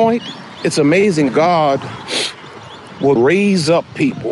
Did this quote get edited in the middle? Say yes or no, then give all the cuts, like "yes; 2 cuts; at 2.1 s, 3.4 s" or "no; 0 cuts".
yes; 2 cuts; at 1.3 s, 3.2 s